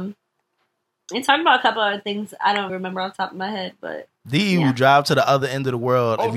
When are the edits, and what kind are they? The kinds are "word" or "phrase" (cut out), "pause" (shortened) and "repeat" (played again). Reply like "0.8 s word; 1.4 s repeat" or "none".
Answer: 2.7 s word; 4.2 s pause

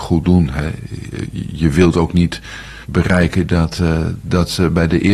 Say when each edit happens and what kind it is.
2.8 s pause

